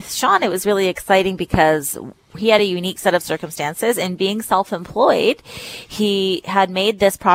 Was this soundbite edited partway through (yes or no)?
no